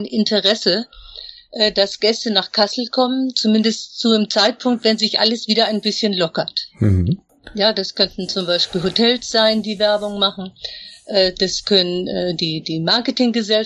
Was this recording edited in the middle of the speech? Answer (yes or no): no